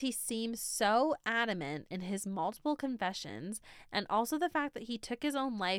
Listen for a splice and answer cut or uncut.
uncut